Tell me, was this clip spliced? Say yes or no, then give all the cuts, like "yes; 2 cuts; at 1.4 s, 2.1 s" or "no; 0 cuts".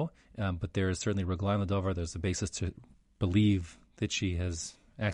no; 0 cuts